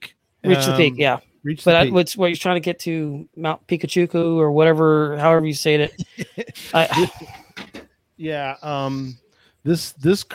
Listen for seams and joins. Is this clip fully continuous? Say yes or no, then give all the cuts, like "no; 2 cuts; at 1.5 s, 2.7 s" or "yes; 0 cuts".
yes; 0 cuts